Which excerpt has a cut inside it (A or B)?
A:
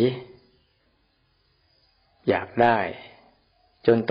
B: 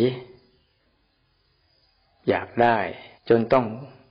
B